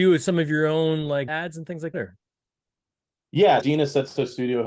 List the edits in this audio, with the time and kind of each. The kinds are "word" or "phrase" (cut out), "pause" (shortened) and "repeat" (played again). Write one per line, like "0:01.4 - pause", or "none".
0:01.3 - word
0:01.9 - word
0:03.6 - word